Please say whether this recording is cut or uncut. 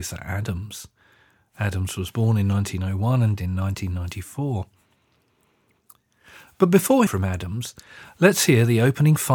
cut